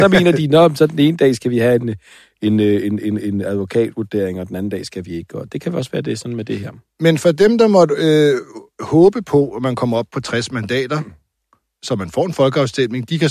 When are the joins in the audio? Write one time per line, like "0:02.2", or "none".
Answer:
none